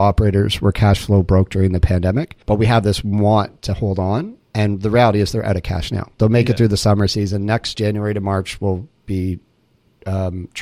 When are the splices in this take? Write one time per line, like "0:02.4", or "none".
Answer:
0:02.4
0:04.5
0:07.7